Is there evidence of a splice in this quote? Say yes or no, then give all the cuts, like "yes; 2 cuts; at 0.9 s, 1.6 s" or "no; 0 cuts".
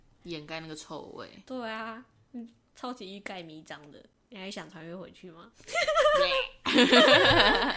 no; 0 cuts